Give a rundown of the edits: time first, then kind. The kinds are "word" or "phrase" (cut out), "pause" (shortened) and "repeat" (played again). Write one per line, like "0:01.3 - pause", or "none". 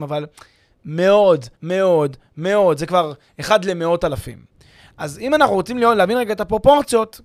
0:01.5 - pause